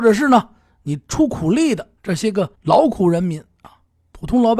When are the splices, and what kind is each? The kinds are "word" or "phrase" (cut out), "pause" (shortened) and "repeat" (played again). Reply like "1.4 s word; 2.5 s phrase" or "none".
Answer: 2.0 s pause; 2.5 s pause

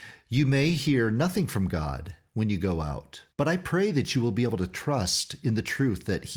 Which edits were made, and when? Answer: 3.3 s pause

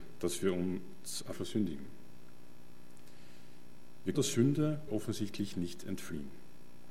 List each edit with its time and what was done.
1.3 s phrase; 4.1 s word; 4.9 s phrase

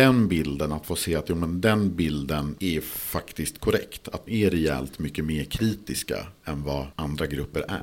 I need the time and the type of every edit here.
4.3 s word

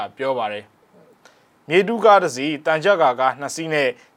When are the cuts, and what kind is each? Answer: none

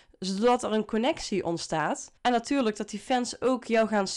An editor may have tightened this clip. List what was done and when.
2.2 s pause

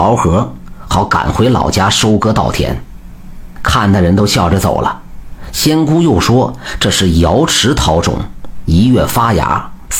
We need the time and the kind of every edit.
none

